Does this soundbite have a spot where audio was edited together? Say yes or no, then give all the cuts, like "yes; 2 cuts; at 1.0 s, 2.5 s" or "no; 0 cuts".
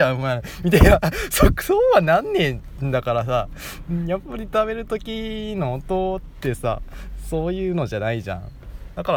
no; 0 cuts